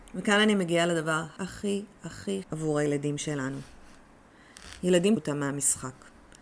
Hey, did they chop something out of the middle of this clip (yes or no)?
yes